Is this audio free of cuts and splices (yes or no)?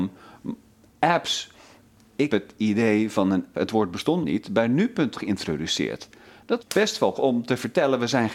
no